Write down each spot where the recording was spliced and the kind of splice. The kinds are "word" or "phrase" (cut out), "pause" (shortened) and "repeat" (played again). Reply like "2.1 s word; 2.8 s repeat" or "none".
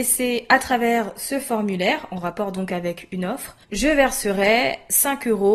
3.6 s pause